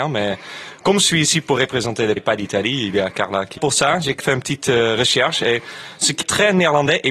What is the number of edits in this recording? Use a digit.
4